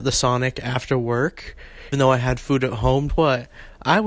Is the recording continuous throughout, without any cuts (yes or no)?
no